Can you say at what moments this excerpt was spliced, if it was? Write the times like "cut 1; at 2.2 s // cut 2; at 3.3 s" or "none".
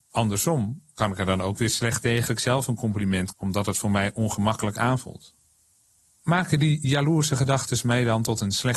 cut 1; at 2.3 s // cut 2; at 3.3 s

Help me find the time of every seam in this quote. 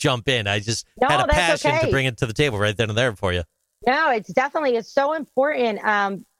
none

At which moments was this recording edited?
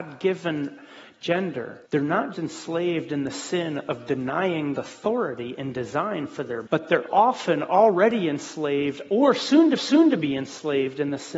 cut 1; at 1.8 s // cut 2; at 2.3 s // cut 3; at 4.8 s // cut 4; at 6.7 s // cut 5; at 7.1 s // cut 6; at 9.8 s

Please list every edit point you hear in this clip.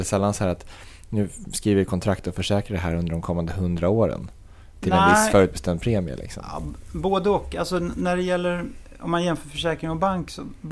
none

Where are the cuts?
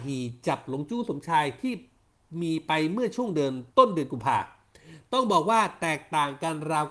cut 1; at 3.7 s

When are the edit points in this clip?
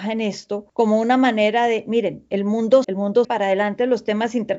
cut 1; at 2.8 s // cut 2; at 3.2 s

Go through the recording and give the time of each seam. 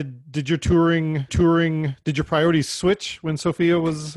cut 1; at 1.3 s

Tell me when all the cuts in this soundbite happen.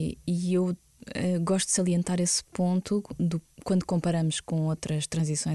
none

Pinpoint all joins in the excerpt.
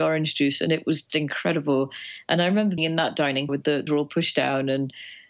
cut 1; at 1.1 s // cut 2; at 2.8 s // cut 3; at 3.5 s // cut 4; at 3.9 s

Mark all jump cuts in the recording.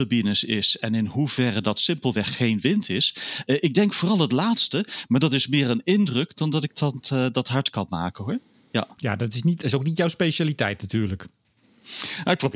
none

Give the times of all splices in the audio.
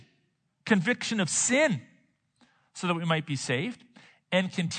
none

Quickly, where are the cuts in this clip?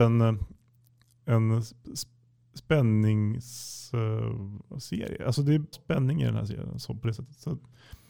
cut 1; at 5.7 s

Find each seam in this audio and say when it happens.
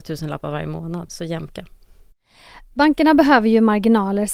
cut 1; at 1.1 s

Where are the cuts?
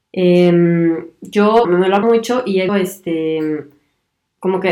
cut 1; at 1.6 s // cut 2; at 2.0 s // cut 3; at 2.7 s

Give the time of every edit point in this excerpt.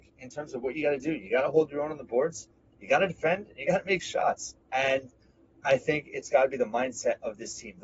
none

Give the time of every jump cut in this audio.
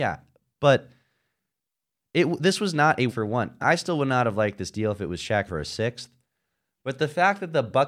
cut 1; at 3.1 s // cut 2; at 3.6 s // cut 3; at 5.5 s

